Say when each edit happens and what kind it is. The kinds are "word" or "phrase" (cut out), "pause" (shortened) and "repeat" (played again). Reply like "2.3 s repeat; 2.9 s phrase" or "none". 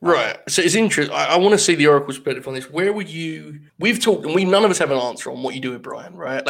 3.7 s pause